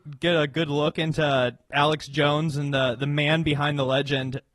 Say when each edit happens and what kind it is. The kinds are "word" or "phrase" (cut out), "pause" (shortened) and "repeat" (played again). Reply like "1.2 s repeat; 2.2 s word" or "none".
1.6 s pause